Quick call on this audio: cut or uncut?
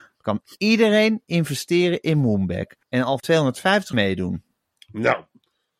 cut